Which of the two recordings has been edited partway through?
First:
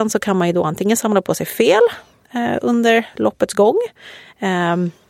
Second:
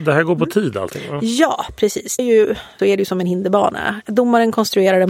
second; 2 cuts; at 2.2 s, 2.8 s

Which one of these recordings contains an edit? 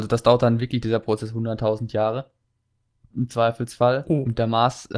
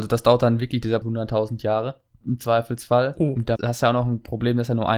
second; 3 cuts; at 1.0 s, 2.1 s, 3.6 s

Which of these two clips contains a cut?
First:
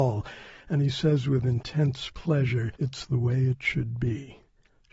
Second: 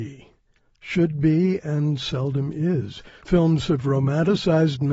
first; 1 cut; at 2.8 s

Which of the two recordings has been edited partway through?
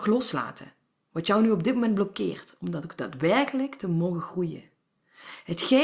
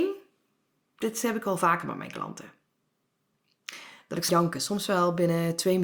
second; 1 cut; at 4.3 s

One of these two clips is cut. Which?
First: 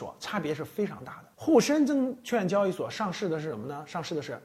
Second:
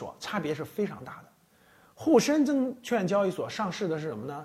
first; 1 cut; at 1.3 s

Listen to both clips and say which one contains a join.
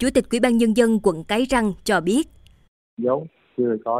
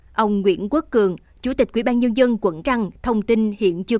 second; 1 cut; at 2.6 s

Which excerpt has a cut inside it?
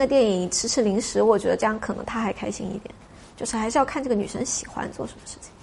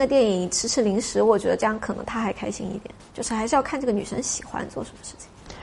second; 1 cut; at 3.0 s

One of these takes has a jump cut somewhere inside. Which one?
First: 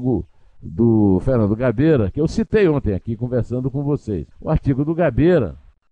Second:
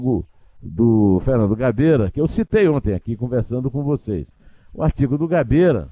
first; 1 cut; at 4.3 s

